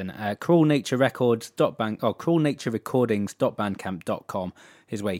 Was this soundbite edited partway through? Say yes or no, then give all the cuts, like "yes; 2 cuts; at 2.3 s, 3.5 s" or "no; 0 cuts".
no; 0 cuts